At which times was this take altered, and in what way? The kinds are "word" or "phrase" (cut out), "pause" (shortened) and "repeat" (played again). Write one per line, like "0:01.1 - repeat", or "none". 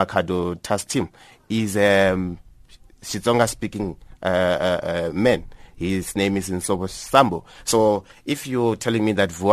none